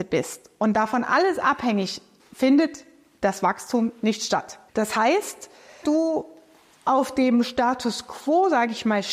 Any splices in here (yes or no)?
yes